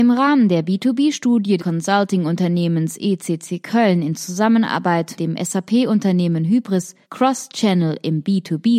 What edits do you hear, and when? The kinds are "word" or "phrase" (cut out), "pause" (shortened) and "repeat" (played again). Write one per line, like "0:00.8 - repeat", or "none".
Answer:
0:01.6 - word
0:05.2 - word
0:07.0 - pause